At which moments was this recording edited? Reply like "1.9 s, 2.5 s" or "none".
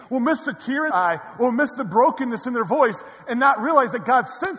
0.9 s